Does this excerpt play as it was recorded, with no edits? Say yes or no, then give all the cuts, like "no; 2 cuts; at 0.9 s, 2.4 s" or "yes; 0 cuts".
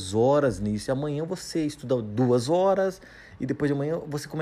yes; 0 cuts